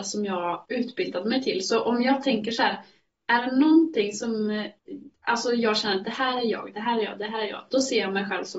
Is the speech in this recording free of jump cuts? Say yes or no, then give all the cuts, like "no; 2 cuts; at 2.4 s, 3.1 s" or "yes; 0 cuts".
yes; 0 cuts